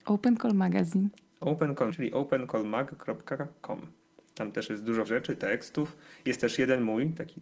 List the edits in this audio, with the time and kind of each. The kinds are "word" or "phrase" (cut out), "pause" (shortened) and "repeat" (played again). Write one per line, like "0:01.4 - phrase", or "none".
0:01.9 - word
0:05.1 - word